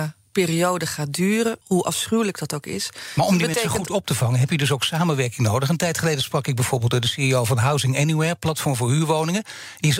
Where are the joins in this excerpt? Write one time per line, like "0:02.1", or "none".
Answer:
0:01.6